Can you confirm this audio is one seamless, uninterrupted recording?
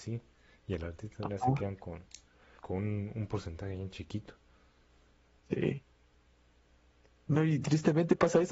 no; 1 cut; at 2.6 s

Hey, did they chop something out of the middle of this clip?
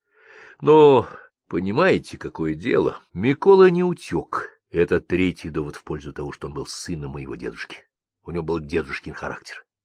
yes; 3 cuts; at 1.3 s, 3.1 s, 4.6 s

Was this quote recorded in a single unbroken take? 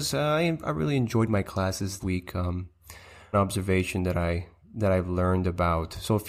no; 2 cuts; at 2.0 s, 3.3 s

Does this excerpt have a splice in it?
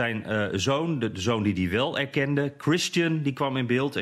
no; 0 cuts

